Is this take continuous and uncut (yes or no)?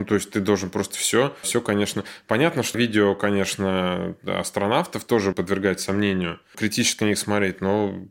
no